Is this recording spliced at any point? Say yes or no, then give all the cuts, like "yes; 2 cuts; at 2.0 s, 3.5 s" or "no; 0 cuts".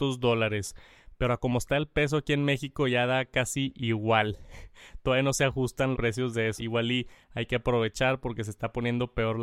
yes; 2 cuts; at 5.9 s, 6.6 s